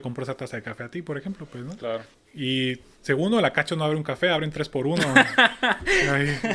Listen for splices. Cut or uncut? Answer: cut